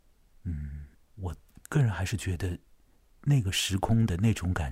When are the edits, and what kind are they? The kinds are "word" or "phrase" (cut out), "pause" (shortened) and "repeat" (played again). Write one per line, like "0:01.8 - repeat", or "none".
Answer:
0:00.9 - pause